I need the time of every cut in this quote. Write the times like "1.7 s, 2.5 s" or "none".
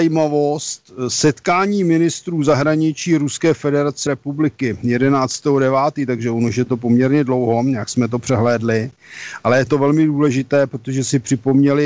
4.1 s